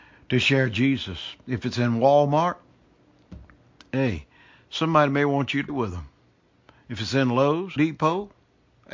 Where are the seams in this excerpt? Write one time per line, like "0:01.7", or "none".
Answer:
0:05.7
0:07.8

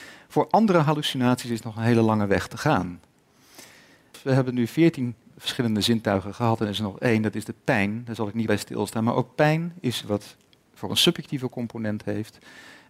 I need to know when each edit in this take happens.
0:05.3
0:08.5
0:10.0
0:10.9

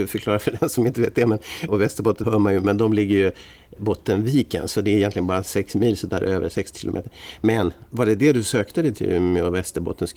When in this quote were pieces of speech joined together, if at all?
0:01.7
0:02.2
0:03.8

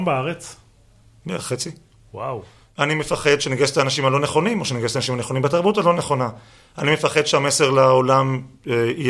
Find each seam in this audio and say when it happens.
none

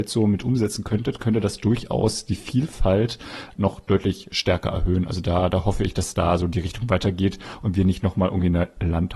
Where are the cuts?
0:03.6

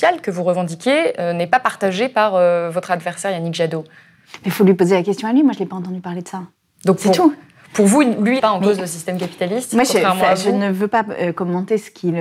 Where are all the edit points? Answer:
0:06.6
0:08.4

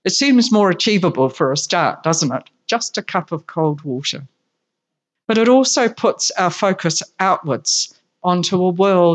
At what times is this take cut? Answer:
none

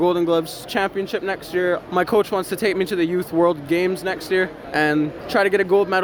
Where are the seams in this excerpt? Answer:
none

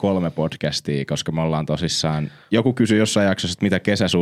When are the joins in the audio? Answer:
none

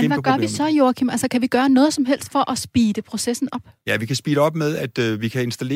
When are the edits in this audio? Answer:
none

